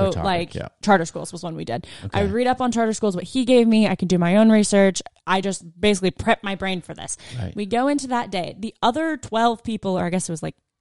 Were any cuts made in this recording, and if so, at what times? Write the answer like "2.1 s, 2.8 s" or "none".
none